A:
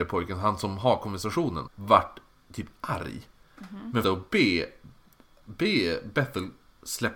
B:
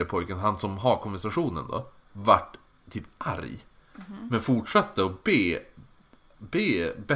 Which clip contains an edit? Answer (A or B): A